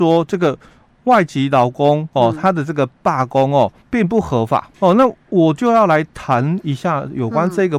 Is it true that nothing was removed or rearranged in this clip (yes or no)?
no